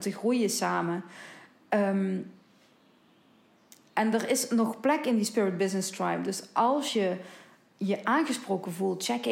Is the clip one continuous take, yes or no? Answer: yes